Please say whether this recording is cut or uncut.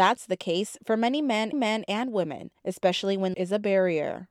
cut